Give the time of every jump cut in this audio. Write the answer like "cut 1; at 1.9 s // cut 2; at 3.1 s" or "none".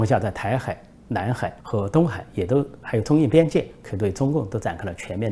cut 1; at 1.6 s